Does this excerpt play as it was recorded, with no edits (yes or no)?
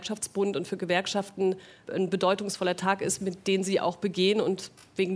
yes